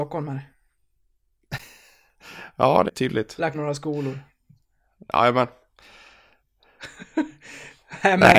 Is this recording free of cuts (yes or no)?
no